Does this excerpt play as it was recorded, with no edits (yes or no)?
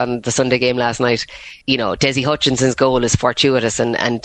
no